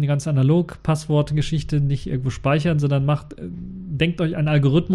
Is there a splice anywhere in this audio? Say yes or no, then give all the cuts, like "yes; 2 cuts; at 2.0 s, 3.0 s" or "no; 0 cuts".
no; 0 cuts